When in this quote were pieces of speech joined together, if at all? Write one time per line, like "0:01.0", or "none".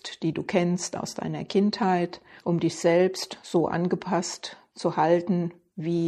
0:02.4